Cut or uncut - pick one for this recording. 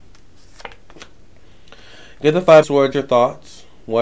cut